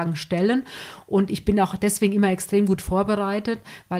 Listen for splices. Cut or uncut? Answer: uncut